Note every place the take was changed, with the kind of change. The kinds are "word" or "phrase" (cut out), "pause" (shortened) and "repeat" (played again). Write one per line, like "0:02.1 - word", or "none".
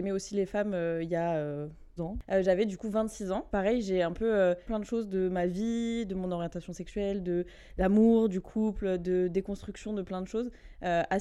0:02.0 - word
0:03.5 - word
0:04.6 - word